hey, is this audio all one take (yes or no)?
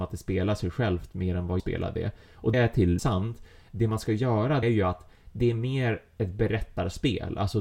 no